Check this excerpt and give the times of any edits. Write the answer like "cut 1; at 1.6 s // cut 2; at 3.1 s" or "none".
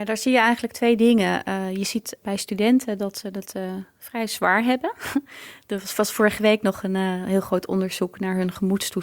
cut 1; at 2.2 s